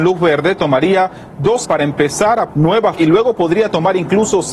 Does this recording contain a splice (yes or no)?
yes